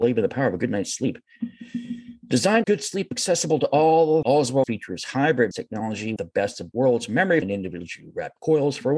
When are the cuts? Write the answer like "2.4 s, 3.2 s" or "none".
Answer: 2.6 s, 4.2 s, 4.6 s, 5.5 s, 6.2 s, 6.7 s, 7.4 s

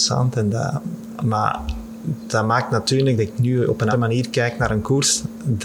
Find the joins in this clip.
3.9 s

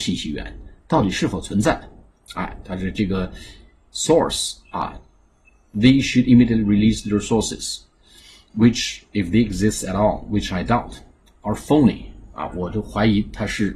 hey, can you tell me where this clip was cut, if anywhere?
none

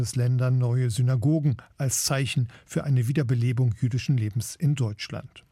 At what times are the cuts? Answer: none

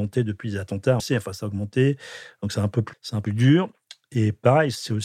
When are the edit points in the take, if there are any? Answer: 1.0 s, 2.9 s, 3.3 s

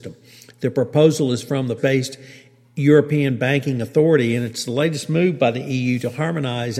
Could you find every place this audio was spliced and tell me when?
1.8 s

